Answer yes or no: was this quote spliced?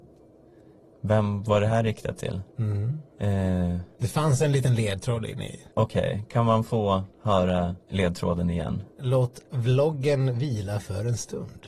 yes